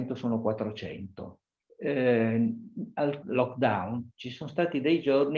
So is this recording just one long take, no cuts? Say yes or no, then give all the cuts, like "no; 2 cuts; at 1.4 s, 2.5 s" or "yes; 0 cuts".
no; 2 cuts; at 1.6 s, 3.2 s